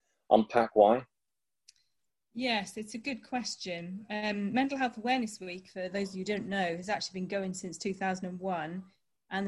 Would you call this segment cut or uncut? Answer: uncut